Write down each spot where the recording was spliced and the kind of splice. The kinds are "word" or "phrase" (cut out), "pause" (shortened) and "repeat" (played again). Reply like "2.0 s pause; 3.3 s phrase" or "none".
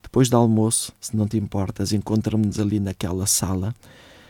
1.0 s pause